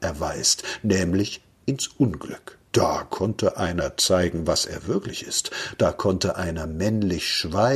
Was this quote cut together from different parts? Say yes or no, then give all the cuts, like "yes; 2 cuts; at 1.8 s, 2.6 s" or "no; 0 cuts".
yes; 1 cut; at 2.7 s